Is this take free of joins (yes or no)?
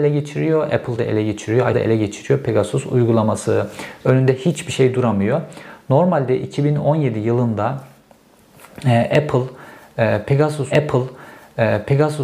no